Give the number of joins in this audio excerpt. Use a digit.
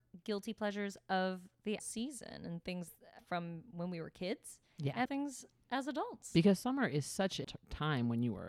4